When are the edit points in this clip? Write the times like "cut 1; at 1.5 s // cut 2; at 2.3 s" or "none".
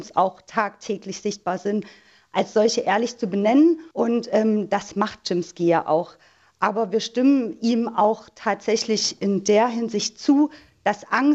cut 1; at 3.9 s